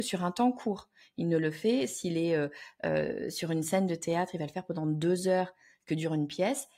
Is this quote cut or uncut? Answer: uncut